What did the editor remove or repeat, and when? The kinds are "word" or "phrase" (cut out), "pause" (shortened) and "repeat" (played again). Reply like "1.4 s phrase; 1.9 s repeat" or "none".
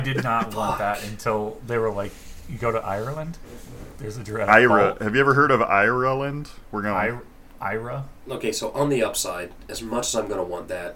none